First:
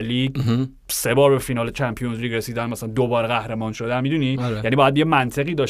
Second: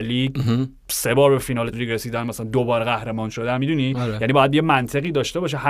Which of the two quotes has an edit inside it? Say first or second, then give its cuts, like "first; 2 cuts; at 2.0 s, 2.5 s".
second; 1 cut; at 1.7 s